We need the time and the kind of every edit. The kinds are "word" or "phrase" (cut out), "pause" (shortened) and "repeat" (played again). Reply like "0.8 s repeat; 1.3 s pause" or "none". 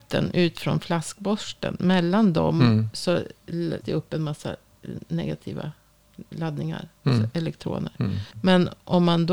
3.8 s word; 6.3 s word; 8.3 s pause